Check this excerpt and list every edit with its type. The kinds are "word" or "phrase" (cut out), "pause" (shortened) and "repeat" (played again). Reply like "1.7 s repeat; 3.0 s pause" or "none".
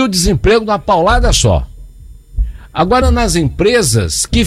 3.0 s word